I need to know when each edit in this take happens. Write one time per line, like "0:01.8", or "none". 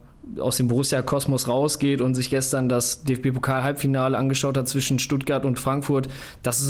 none